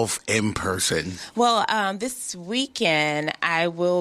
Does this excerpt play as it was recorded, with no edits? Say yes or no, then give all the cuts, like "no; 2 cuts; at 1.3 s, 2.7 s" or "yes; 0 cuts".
yes; 0 cuts